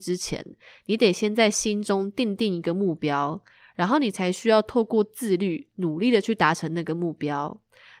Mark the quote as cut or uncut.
uncut